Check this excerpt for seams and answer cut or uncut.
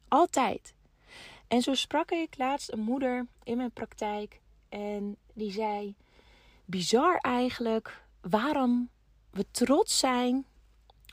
uncut